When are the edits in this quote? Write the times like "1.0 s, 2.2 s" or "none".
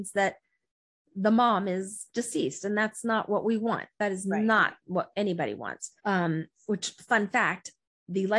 6.0 s